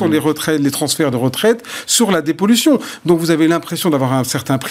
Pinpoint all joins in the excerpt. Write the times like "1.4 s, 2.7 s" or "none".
none